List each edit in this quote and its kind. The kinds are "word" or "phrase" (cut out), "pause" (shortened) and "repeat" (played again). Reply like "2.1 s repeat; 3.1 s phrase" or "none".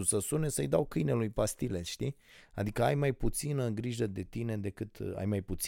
none

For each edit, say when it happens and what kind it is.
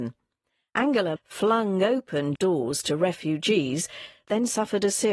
1.2 s word; 2.4 s word

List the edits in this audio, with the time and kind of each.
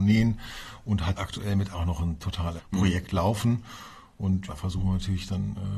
1.1 s word; 1.7 s word; 2.6 s word; 4.5 s word

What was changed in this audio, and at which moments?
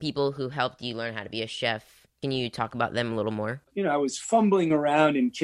3.7 s pause

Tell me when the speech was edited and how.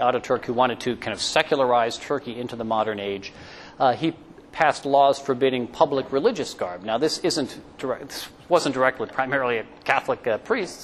none

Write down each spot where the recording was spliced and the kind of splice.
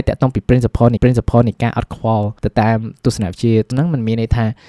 1.0 s repeat; 2.4 s pause; 3.7 s word

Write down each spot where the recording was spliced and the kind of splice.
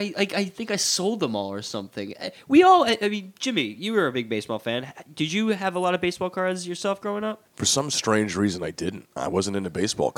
7.5 s pause; 9.1 s pause

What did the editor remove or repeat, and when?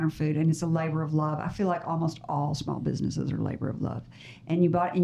none

